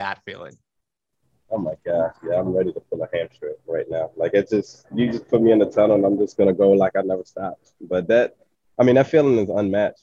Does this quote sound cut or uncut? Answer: uncut